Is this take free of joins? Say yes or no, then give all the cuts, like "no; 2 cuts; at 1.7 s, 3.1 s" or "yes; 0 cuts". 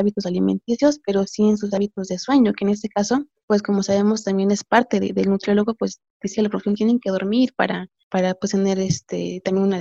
yes; 0 cuts